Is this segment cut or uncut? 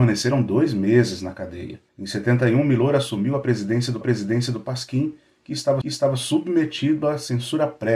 cut